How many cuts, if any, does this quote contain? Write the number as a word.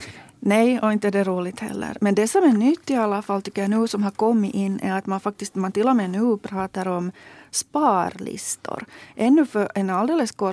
zero